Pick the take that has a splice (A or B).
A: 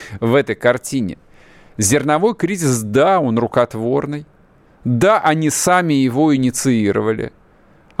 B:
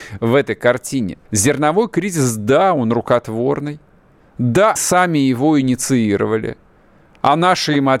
B